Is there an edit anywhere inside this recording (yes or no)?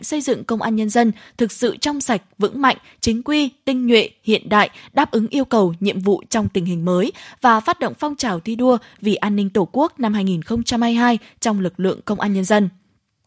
no